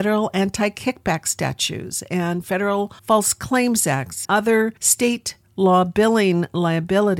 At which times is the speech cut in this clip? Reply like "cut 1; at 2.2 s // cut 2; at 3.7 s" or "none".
cut 1; at 3.0 s // cut 2; at 4.2 s // cut 3; at 4.8 s